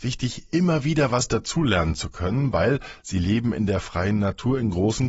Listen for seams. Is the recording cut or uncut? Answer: uncut